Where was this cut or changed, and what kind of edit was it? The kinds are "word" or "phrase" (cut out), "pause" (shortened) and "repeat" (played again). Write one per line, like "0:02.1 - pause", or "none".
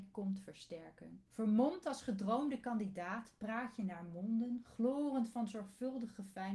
0:01.3 - pause